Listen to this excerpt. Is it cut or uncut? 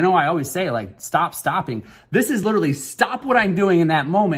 uncut